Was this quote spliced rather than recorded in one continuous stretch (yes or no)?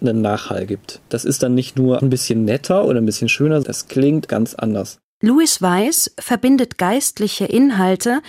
yes